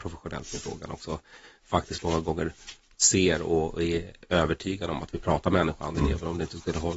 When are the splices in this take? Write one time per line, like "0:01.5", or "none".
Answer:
none